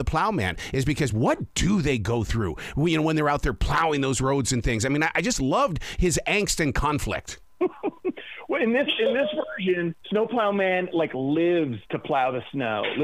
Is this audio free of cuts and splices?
no; 2 cuts; at 7.4 s, 10.0 s

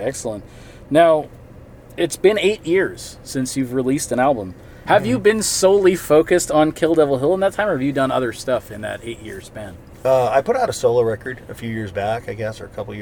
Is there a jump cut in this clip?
no; 0 cuts

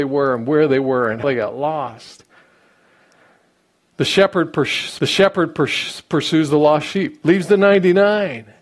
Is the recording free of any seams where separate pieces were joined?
no; 2 cuts; at 1.2 s, 5.0 s

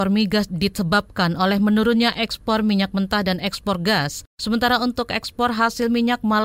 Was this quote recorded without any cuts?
yes; 0 cuts

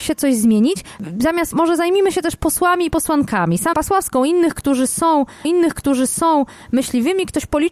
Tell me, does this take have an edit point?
yes; 3 cuts; at 1.5 s, 3.7 s, 5.4 s

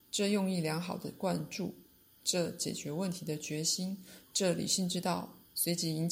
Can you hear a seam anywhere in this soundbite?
no; 0 cuts

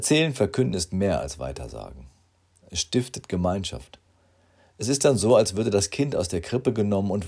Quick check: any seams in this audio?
no; 0 cuts

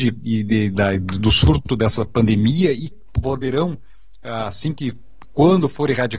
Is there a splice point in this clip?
yes; 1 cut; at 2.9 s

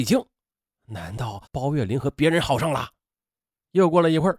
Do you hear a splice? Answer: yes; 1 cut; at 1.5 s

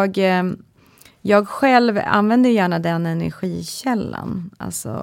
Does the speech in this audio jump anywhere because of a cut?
no; 0 cuts

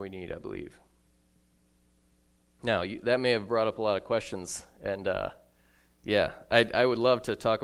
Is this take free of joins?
yes; 0 cuts

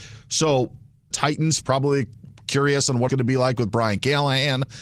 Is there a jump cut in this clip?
yes; 3 cuts; at 1.1 s, 1.6 s, 3.1 s

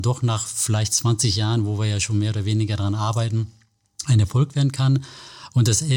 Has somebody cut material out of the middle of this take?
no; 0 cuts

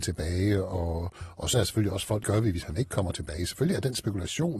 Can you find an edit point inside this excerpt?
yes; 2 cuts; at 1.5 s, 2.2 s

